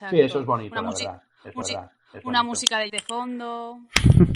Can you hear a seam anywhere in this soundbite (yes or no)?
yes